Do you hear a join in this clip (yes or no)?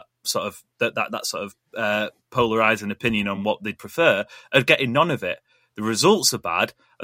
no